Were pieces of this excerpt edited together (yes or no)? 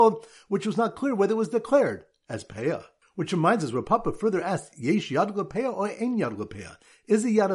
no